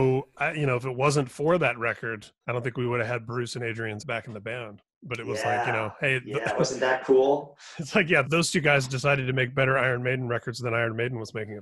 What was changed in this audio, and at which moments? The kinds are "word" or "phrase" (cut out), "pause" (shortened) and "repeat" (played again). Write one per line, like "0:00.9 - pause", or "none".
0:02.4 - pause
0:04.0 - word
0:08.2 - word